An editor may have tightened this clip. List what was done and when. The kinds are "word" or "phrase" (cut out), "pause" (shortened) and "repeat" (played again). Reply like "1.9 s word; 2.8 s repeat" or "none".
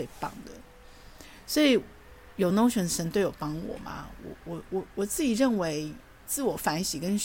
none